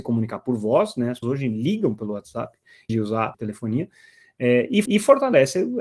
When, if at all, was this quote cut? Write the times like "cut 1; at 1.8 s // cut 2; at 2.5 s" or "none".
cut 1; at 1.2 s // cut 2; at 2.9 s // cut 3; at 3.3 s // cut 4; at 4.8 s